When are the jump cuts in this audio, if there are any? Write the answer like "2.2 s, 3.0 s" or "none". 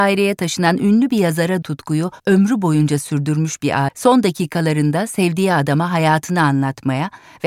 1.6 s, 2.2 s, 3.9 s